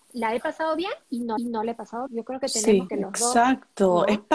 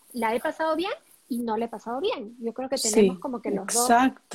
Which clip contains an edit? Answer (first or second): first